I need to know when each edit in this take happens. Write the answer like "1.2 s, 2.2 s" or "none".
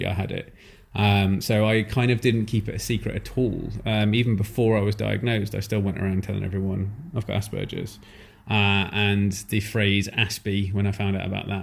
none